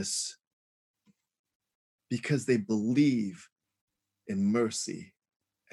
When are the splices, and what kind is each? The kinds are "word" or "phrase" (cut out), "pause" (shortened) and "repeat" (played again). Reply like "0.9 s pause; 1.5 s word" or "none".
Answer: none